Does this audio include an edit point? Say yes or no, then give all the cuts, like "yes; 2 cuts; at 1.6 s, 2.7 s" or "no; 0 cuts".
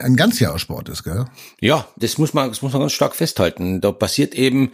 yes; 1 cut; at 2.0 s